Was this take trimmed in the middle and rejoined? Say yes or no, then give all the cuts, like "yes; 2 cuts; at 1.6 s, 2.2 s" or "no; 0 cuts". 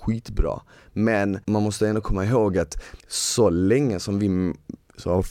yes; 1 cut; at 3.0 s